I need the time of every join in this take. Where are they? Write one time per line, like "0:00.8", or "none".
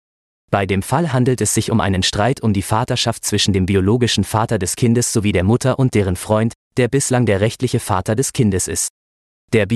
none